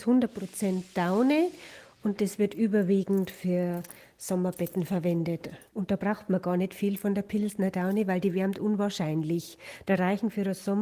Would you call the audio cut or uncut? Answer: uncut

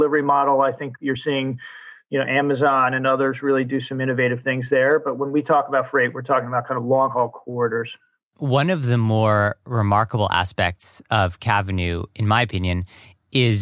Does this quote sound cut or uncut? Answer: uncut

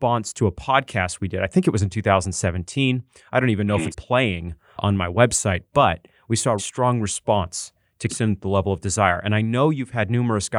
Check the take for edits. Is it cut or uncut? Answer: cut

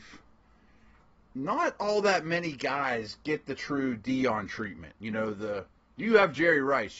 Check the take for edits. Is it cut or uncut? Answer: uncut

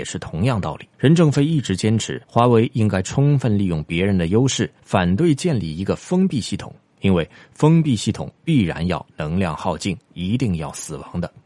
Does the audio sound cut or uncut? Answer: cut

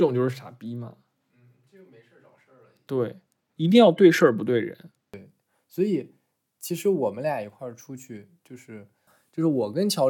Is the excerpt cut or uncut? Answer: uncut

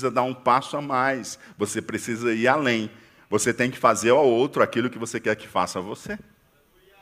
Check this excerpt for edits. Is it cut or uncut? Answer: uncut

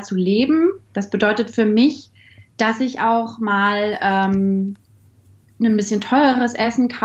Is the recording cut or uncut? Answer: uncut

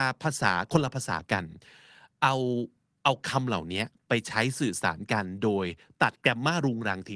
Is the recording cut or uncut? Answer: uncut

